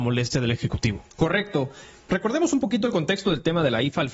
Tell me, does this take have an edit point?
no; 0 cuts

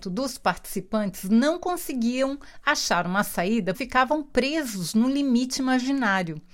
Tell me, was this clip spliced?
yes; 1 cut; at 3.7 s

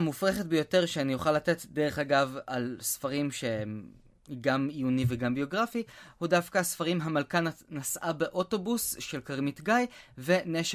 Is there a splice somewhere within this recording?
no; 0 cuts

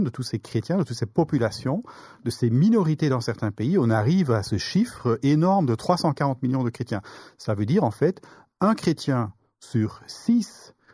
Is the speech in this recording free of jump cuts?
yes; 0 cuts

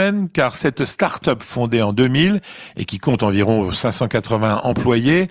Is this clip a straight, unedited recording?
yes; 0 cuts

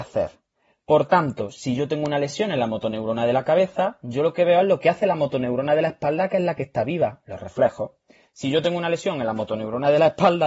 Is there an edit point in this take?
no; 0 cuts

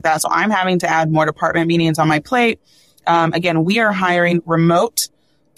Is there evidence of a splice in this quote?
no; 0 cuts

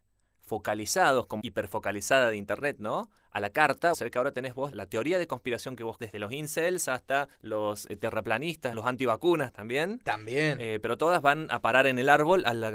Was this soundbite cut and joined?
yes; 6 cuts; at 1.4 s, 3.9 s, 4.7 s, 6.0 s, 7.3 s, 8.7 s

